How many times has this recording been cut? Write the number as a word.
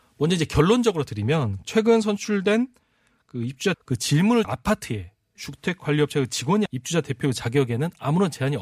six